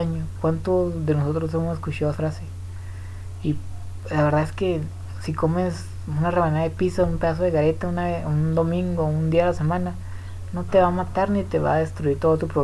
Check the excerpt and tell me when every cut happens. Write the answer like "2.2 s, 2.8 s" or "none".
2.1 s